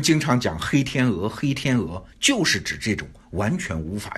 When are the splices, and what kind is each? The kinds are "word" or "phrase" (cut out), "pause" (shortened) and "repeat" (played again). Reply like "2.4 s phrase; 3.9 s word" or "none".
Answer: 2.1 s word